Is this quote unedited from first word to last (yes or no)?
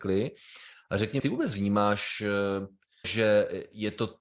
no